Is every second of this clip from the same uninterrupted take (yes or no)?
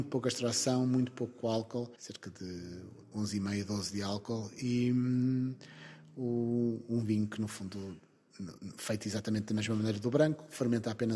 no